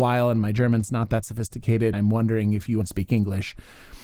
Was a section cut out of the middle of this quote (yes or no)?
yes